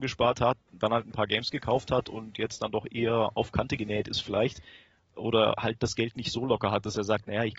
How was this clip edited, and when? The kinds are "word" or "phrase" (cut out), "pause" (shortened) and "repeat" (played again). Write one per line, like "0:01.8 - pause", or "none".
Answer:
none

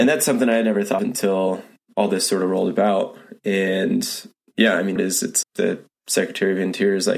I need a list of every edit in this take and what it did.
0:01.0 - word
0:05.0 - word
0:05.4 - word

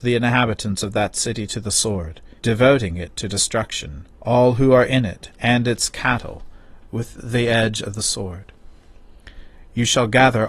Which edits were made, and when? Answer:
0:02.4 - pause
0:04.2 - pause

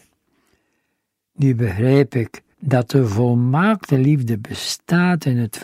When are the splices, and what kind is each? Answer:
0:02.5 - pause

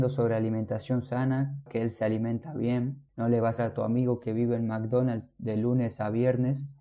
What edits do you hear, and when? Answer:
0:01.7 - phrase
0:03.1 - pause
0:03.6 - phrase

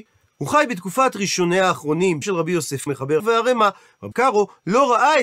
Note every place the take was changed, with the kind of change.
0:02.2 - word
0:02.9 - word
0:03.2 - phrase
0:04.1 - word

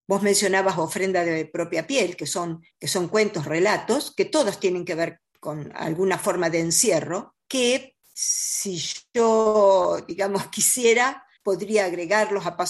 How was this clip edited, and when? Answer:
0:02.7 - pause

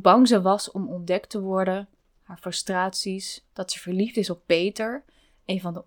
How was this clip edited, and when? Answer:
none

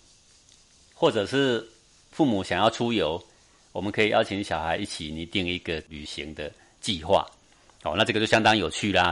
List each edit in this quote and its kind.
none

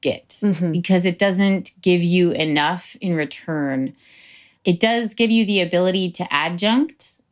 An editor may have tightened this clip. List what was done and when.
none

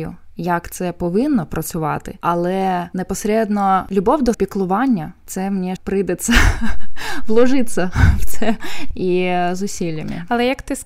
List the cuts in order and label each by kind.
0:04.3 - word
0:05.2 - word
0:05.8 - word
0:08.9 - word

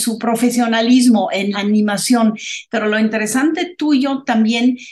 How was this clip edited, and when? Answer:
0:01.5 - word

